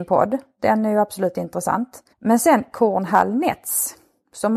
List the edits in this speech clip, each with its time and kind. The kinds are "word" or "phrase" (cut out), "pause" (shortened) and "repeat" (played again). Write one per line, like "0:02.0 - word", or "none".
0:02.1 - pause